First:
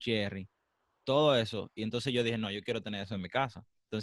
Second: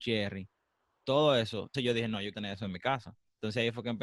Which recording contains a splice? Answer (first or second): second